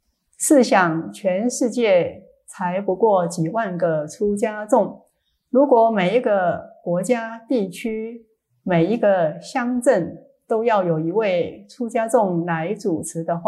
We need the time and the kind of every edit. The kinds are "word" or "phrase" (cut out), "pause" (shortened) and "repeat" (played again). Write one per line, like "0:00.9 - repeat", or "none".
none